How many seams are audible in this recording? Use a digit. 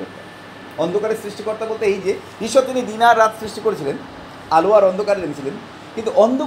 0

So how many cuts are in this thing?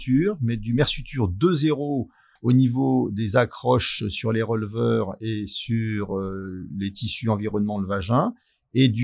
0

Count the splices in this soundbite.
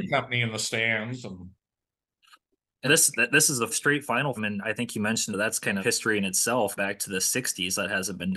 6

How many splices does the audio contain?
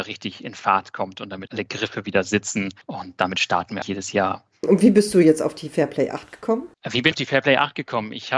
5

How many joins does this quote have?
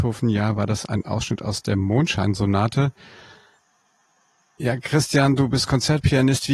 0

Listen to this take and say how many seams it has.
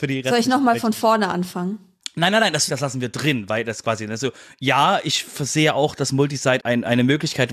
2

